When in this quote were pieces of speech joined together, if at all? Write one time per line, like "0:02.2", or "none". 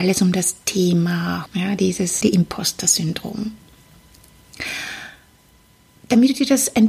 0:01.5
0:02.2